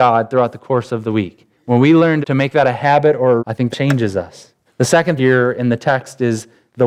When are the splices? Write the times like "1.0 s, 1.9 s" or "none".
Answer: 1.5 s, 2.2 s, 3.4 s, 3.7 s, 4.7 s, 5.2 s

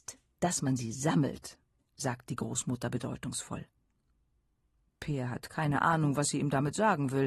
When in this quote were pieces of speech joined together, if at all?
none

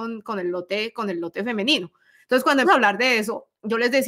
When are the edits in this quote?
2.6 s

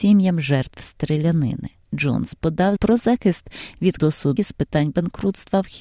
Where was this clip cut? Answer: 2.8 s, 4.0 s, 4.4 s

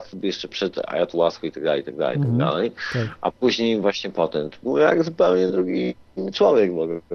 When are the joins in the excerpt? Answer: none

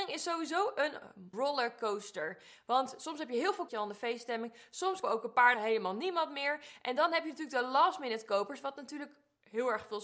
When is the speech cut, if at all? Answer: 1.3 s, 3.7 s, 5.0 s, 5.5 s

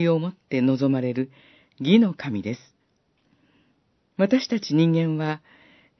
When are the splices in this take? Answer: none

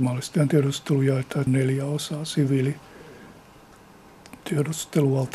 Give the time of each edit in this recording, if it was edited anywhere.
1.5 s, 4.4 s

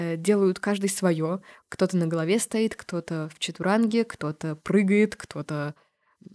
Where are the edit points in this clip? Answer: none

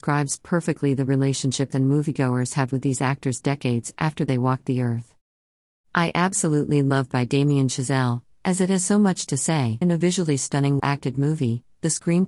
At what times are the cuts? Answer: 1.7 s, 7.1 s, 9.8 s, 10.8 s

